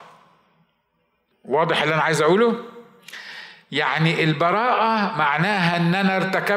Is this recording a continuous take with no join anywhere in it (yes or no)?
yes